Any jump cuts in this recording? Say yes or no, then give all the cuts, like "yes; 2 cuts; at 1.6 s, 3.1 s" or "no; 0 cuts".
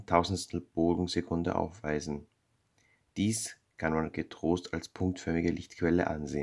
no; 0 cuts